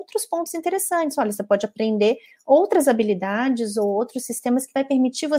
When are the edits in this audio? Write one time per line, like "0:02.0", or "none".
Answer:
none